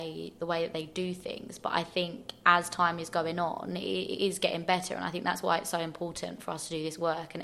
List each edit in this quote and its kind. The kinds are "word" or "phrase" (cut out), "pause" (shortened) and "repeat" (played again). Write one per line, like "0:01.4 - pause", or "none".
none

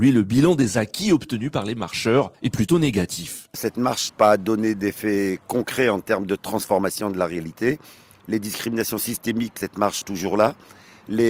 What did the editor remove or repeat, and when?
0:02.3 - pause
0:04.1 - word
0:09.6 - word
0:10.0 - word

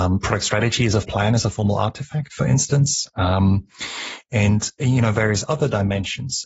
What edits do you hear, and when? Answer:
0:01.0 - word

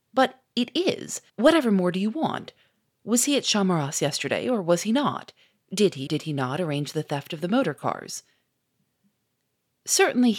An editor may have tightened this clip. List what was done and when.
0:01.3 - pause
0:06.1 - word

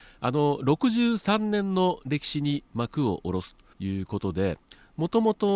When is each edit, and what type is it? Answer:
0:03.7 - pause

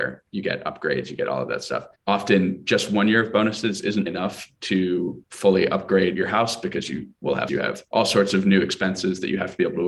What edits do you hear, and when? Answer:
0:04.1 - word
0:07.5 - phrase

